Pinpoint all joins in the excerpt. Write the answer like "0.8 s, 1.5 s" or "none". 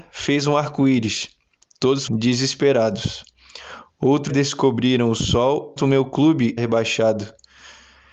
2.1 s, 4.3 s, 5.8 s, 6.6 s